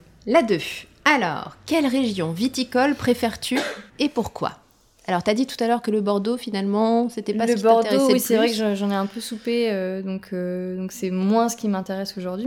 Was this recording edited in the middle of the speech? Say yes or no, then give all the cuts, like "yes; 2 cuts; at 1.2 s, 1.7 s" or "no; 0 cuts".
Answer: yes; 1 cut; at 3.9 s